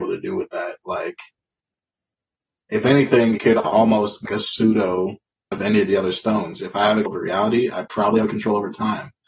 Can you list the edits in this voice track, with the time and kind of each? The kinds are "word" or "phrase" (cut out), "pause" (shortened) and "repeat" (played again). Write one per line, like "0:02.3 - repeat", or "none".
0:03.4 - word
0:04.2 - word
0:05.5 - word
0:07.1 - word